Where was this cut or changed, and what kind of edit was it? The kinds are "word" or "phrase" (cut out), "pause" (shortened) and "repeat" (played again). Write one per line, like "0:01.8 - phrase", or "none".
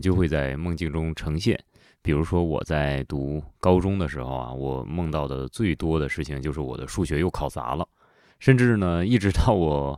none